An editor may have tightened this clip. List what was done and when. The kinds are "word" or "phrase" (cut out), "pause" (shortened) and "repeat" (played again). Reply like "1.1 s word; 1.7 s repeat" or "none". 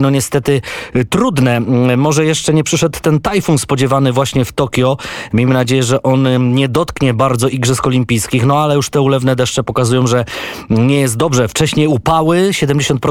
none